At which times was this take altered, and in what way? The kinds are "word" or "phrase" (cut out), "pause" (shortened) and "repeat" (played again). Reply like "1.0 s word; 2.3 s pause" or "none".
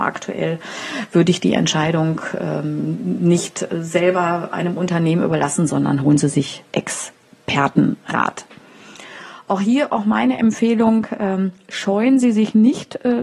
6.7 s pause